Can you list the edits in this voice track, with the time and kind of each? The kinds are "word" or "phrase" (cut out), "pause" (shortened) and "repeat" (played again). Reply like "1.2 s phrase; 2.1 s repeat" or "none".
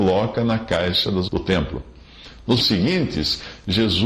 1.3 s word; 2.6 s word